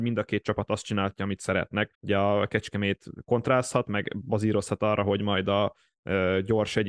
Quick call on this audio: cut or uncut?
cut